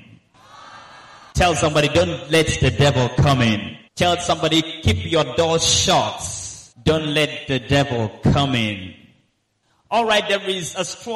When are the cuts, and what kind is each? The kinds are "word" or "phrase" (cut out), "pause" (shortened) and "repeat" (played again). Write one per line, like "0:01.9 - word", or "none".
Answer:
0:01.3 - pause
0:03.9 - pause
0:06.7 - pause

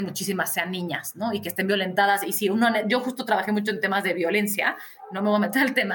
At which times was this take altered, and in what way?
none

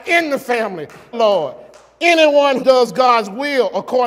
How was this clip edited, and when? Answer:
0:01.1 - phrase
0:02.6 - word

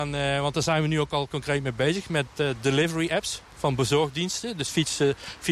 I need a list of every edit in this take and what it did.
none

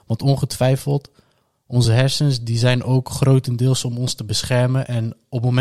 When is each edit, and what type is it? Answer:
none

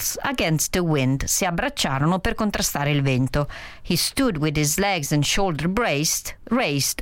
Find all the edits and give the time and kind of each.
none

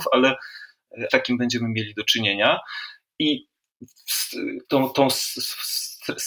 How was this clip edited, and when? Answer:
0:01.1 - phrase
0:04.6 - pause

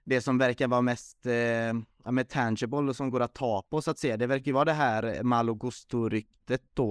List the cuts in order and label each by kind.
none

